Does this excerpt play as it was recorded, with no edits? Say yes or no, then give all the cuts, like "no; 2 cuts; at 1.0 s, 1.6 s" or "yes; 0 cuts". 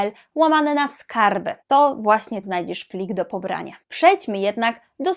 no; 3 cuts; at 1.6 s, 2.4 s, 3.8 s